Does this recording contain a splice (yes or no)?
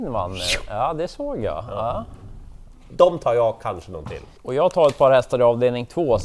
yes